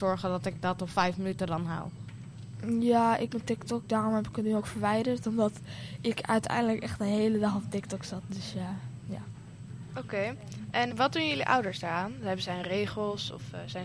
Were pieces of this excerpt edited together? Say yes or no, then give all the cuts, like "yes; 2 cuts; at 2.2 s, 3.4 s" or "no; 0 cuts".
yes; 2 cuts; at 3.3 s, 10.9 s